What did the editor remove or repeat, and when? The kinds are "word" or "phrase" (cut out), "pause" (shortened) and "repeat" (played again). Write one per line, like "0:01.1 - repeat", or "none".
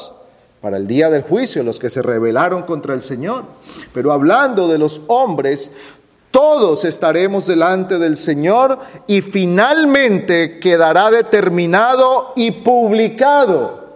none